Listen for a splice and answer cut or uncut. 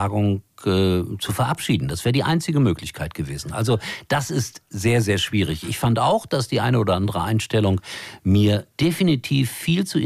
cut